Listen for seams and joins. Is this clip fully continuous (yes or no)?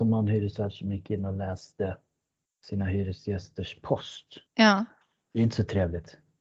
no